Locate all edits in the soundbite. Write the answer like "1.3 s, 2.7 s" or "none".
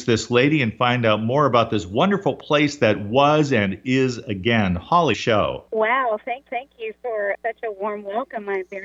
5.1 s, 5.7 s, 6.5 s, 7.3 s